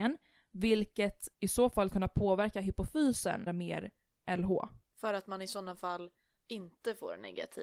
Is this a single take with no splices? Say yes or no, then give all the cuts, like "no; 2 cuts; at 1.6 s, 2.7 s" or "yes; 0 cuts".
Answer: no; 4 cuts; at 1.3 s, 1.9 s, 3.5 s, 4.8 s